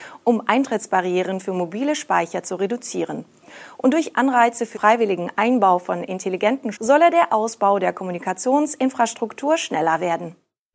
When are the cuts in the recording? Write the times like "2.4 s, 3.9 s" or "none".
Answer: 4.7 s, 6.7 s